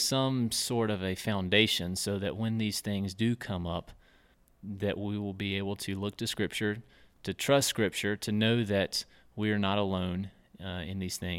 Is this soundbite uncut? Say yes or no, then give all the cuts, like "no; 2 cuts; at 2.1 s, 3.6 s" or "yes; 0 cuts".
yes; 0 cuts